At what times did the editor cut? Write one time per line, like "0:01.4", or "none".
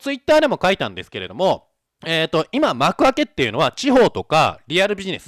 0:01.9